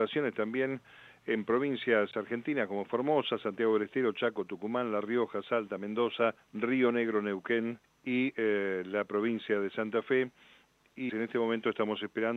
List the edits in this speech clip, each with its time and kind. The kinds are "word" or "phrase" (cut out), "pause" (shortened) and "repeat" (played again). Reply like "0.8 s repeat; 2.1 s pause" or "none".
6.4 s pause; 7.8 s pause; 11.1 s word